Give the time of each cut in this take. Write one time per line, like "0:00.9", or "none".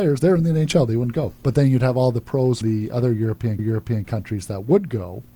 0:01.4
0:02.6
0:03.6